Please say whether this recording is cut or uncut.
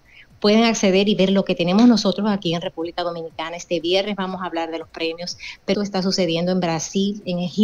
cut